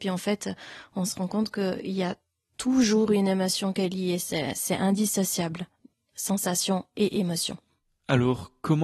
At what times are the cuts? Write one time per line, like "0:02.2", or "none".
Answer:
none